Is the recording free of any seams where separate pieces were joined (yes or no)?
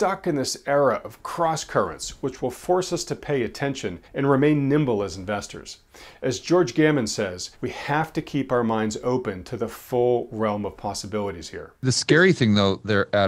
no